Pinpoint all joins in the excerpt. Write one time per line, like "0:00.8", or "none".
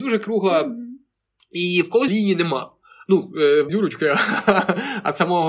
0:02.1
0:03.7